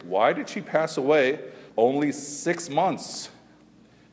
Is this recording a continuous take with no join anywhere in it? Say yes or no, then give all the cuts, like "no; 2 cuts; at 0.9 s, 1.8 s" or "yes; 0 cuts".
no; 1 cut; at 1.7 s